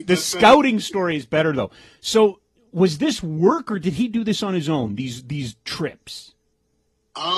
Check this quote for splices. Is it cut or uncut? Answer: uncut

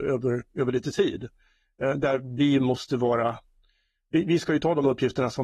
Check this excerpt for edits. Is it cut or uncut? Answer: uncut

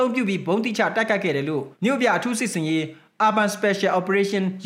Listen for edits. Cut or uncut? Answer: cut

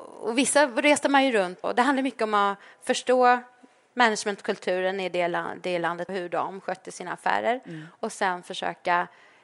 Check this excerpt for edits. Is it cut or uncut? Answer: cut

